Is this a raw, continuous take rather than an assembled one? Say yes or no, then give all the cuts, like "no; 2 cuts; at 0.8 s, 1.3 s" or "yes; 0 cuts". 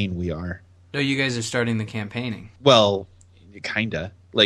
no; 1 cut; at 2.6 s